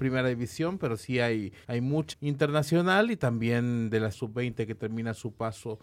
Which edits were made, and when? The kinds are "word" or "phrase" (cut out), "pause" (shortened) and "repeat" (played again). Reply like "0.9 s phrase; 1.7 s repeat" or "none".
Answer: 1.6 s pause; 2.1 s word; 4.1 s word